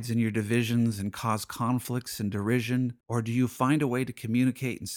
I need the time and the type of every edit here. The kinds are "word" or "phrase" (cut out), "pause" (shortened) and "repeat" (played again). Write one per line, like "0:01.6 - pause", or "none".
0:03.0 - pause

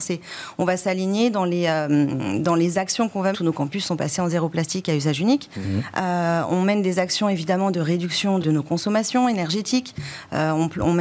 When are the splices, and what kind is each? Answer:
0:03.3 - phrase
0:08.4 - word

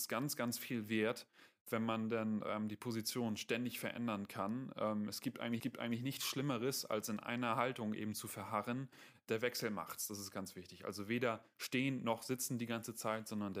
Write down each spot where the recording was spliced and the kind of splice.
0:05.6 - repeat
0:10.3 - word

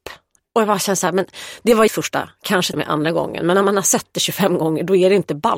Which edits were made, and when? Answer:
0:01.9 - word
0:02.7 - word

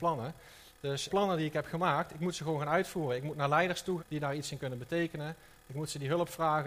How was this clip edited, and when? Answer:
0:01.1 - word
0:04.0 - word

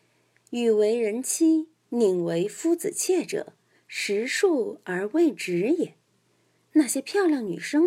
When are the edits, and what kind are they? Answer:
none

